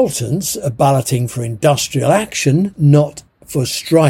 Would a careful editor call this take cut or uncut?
cut